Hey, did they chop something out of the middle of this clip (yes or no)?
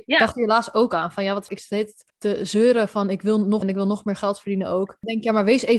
yes